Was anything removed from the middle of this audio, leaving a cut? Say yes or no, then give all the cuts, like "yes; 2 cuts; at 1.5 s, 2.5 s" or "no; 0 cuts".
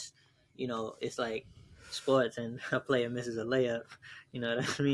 no; 0 cuts